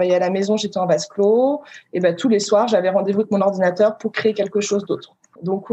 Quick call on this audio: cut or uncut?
uncut